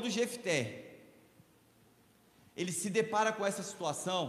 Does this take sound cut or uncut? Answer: uncut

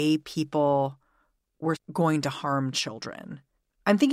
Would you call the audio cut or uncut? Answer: cut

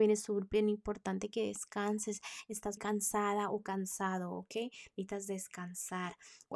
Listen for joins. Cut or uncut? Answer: cut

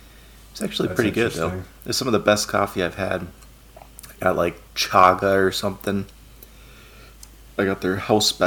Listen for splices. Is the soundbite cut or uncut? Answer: uncut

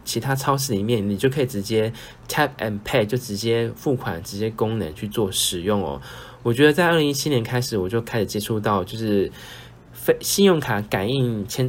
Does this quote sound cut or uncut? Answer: uncut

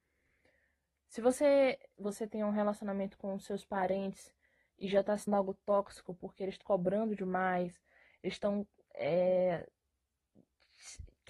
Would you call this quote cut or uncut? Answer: cut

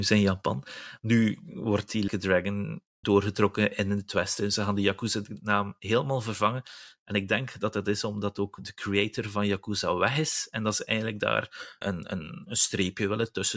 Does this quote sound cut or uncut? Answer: cut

